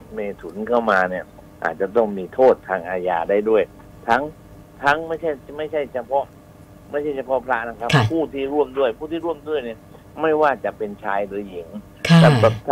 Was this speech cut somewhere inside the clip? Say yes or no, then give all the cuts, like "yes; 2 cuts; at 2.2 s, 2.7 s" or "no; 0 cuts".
no; 0 cuts